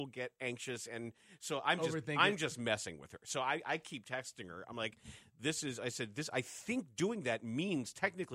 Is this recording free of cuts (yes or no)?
yes